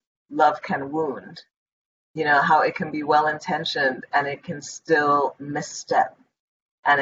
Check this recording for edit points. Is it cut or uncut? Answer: uncut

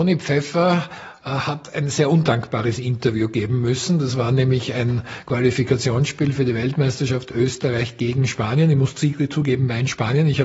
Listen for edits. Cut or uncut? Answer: uncut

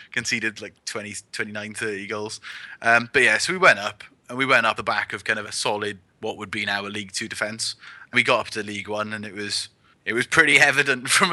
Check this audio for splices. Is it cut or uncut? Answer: cut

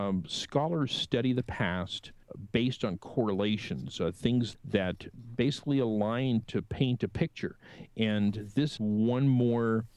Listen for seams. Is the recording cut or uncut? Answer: cut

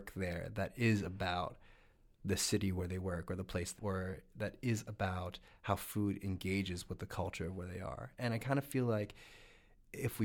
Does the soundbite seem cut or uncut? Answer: cut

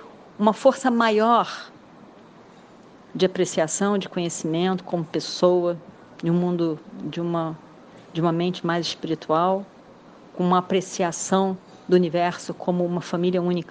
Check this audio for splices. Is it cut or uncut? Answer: uncut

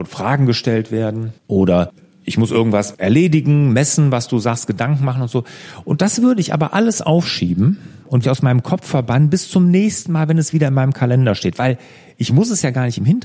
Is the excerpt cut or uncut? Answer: cut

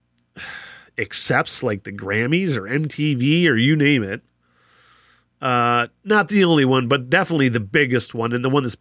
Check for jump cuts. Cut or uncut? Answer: uncut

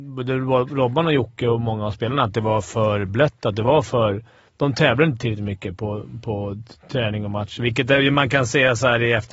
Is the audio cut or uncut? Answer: uncut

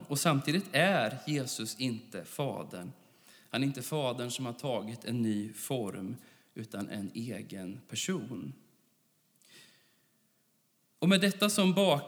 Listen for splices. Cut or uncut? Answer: uncut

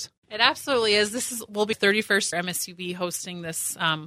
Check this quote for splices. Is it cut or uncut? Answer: cut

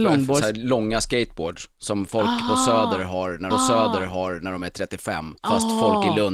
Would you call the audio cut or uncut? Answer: cut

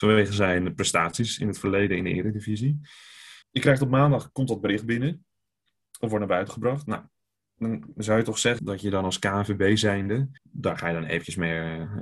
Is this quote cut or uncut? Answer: cut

